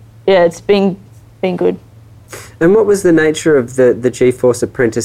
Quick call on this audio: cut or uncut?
uncut